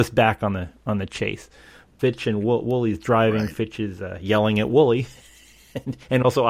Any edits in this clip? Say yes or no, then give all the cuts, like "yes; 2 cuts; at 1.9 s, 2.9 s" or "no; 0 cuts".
no; 0 cuts